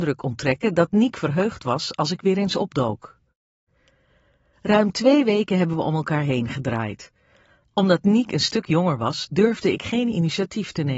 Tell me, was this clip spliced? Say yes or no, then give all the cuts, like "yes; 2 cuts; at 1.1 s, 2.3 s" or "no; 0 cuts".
no; 0 cuts